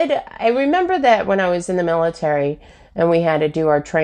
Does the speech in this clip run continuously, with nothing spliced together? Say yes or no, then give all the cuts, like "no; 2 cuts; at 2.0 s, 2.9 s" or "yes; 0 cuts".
yes; 0 cuts